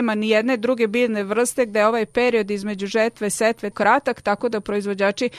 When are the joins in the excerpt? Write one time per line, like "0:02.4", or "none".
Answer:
0:03.7